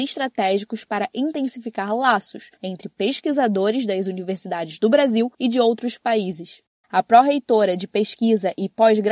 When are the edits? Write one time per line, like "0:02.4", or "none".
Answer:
0:02.6
0:05.3